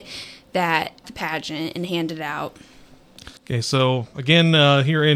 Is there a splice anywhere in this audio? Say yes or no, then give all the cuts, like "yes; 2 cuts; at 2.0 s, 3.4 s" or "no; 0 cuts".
yes; 2 cuts; at 1.0 s, 3.4 s